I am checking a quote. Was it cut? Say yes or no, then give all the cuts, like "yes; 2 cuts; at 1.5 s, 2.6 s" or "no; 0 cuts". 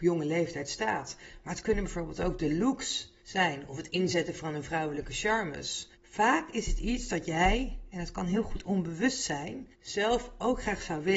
yes; 3 cuts; at 3.2 s, 5.9 s, 9.7 s